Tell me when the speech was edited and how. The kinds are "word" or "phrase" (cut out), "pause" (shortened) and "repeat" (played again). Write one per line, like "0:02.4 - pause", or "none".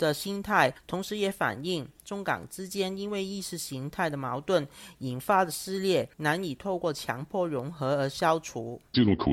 0:06.1 - pause